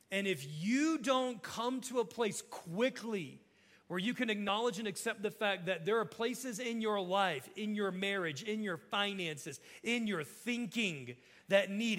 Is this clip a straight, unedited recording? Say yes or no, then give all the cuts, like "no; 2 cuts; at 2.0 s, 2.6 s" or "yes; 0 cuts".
yes; 0 cuts